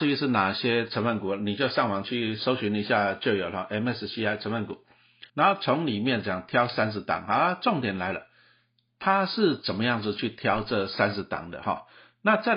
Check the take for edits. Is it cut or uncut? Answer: cut